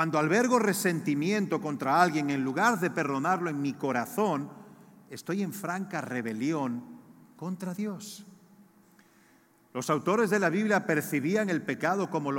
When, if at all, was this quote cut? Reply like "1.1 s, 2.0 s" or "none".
none